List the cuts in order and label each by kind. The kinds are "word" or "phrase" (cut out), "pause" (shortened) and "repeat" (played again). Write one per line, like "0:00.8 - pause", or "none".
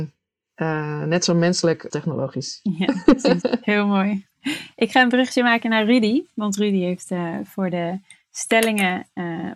0:01.9 - word